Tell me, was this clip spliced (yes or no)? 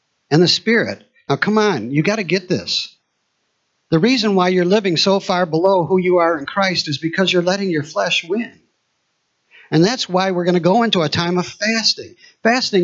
no